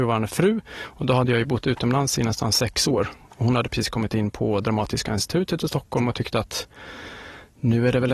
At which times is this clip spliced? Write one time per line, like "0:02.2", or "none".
none